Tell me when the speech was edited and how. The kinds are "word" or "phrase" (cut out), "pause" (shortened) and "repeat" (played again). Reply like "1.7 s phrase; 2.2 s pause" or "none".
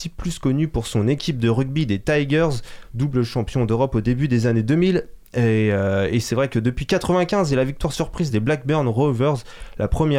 none